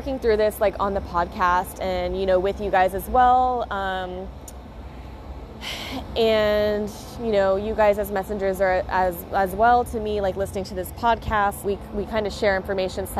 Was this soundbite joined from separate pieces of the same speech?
yes; 1 cut; at 11.6 s

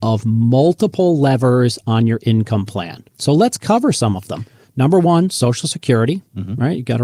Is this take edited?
yes; 1 cut; at 3.1 s

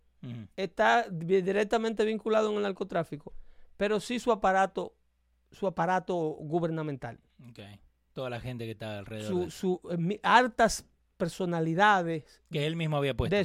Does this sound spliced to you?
no; 0 cuts

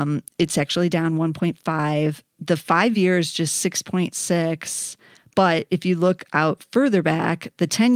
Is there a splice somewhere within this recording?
no; 0 cuts

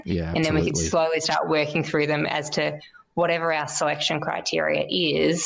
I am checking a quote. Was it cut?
no; 0 cuts

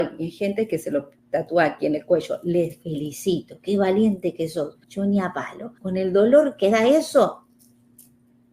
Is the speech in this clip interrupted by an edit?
yes; 3 cuts; at 1.2 s, 4.8 s, 5.8 s

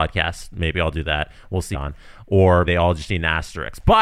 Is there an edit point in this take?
yes; 2 cuts; at 1.7 s, 2.6 s

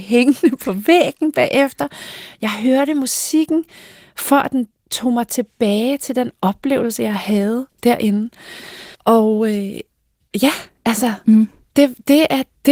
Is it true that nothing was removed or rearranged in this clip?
no; 1 cut; at 8.9 s

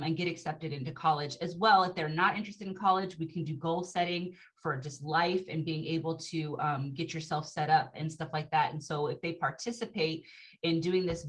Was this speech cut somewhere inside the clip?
no; 0 cuts

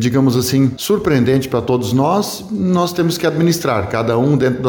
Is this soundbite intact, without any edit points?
yes; 0 cuts

